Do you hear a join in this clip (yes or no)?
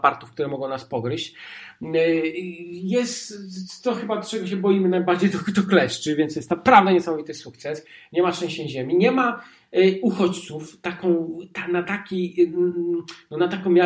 no